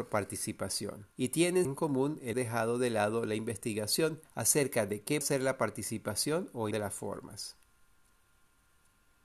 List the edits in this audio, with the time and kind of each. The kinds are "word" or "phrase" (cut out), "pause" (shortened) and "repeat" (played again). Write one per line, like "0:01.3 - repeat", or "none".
0:01.1 - pause
0:01.6 - word
0:02.3 - word
0:04.3 - pause
0:05.2 - word
0:06.7 - word